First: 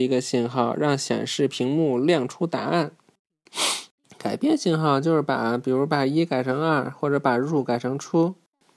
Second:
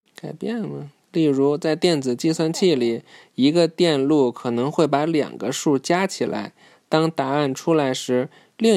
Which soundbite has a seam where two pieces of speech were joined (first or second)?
first